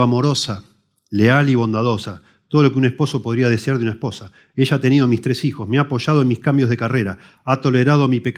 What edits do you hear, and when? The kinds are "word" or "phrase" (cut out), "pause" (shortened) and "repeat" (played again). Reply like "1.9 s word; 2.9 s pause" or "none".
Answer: none